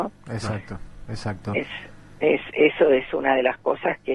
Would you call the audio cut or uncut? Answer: uncut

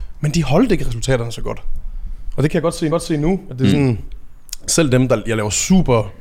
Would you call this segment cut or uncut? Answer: cut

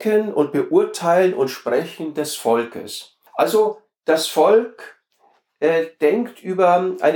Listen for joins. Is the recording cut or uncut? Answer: cut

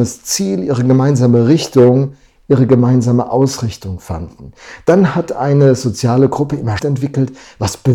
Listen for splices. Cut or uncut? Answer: cut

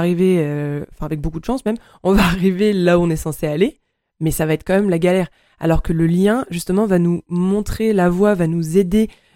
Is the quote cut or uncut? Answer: uncut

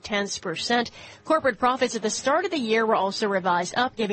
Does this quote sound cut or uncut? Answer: uncut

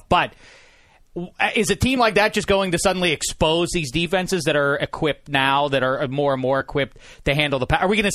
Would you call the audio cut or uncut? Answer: uncut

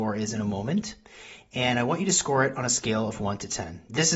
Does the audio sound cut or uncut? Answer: uncut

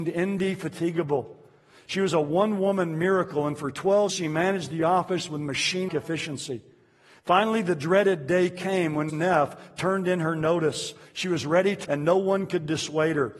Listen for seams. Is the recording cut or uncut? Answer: cut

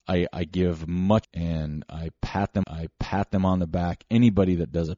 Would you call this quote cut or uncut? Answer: cut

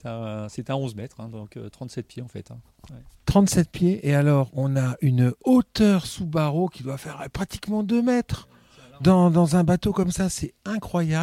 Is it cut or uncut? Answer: cut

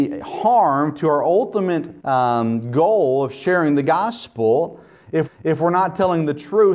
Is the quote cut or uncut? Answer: cut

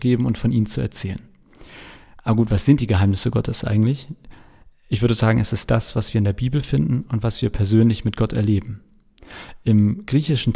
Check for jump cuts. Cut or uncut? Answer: uncut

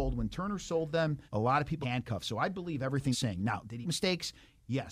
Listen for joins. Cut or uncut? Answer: cut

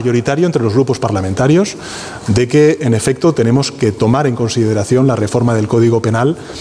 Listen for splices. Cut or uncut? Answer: uncut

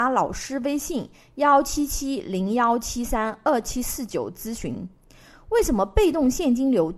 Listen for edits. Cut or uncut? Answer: uncut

